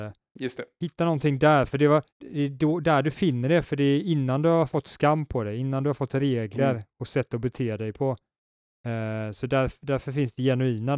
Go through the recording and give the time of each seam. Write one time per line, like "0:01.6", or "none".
0:02.1